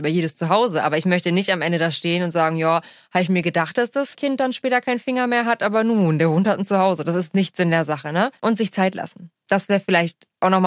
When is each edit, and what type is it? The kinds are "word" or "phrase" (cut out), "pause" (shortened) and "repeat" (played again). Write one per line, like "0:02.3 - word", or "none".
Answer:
0:08.4 - pause